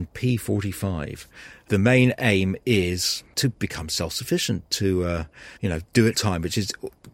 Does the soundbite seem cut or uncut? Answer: cut